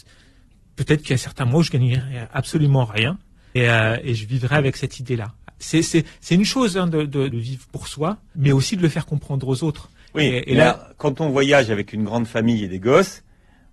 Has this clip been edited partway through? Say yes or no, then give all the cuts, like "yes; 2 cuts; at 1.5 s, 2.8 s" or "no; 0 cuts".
yes; 3 cuts; at 3.6 s, 7.3 s, 8.3 s